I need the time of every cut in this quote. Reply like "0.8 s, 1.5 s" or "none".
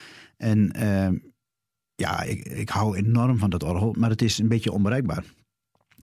none

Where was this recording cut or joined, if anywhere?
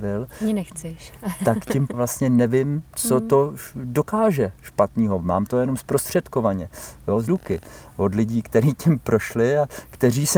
1.9 s, 7.3 s

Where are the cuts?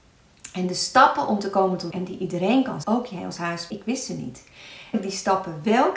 1.9 s, 2.8 s, 3.7 s, 4.9 s

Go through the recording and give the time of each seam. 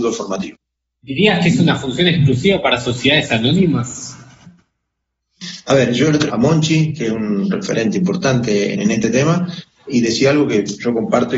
6.3 s, 8.7 s

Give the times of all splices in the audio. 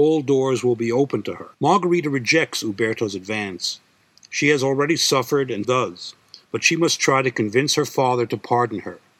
1.5 s, 5.6 s, 6.4 s

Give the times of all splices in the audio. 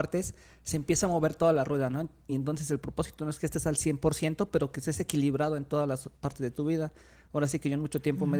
none

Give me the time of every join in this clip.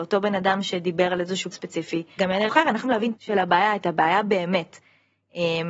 1.5 s, 2.2 s, 2.5 s, 2.8 s, 3.2 s

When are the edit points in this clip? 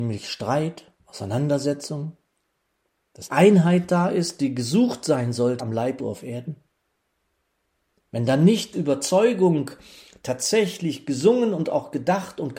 3.3 s, 5.6 s, 6.0 s, 8.7 s

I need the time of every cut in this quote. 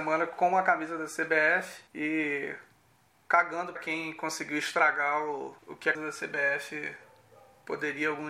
1.9 s, 3.8 s, 5.6 s, 5.9 s

